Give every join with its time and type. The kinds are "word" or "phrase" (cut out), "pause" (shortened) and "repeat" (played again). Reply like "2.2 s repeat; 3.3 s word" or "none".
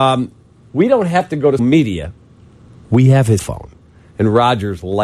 1.6 s word; 3.4 s word